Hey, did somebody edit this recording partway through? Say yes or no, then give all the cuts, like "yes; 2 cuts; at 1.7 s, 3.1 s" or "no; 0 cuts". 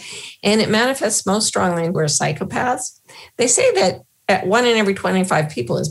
yes; 1 cut; at 1.9 s